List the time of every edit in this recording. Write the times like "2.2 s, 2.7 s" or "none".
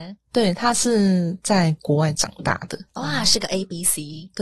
2.9 s